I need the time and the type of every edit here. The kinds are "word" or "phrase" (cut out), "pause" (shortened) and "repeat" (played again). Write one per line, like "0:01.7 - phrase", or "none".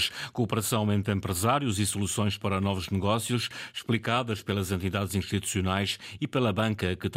none